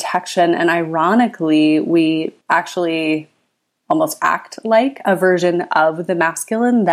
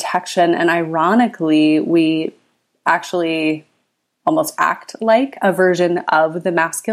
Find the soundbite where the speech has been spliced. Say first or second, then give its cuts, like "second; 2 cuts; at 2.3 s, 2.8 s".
first; 1 cut; at 2.4 s